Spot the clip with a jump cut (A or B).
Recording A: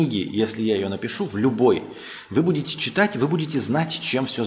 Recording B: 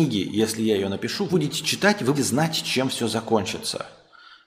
B